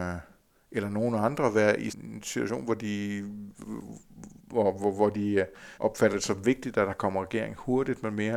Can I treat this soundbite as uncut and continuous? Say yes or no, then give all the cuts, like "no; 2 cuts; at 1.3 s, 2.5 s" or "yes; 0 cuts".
no; 3 cuts; at 1.9 s, 4.4 s, 5.7 s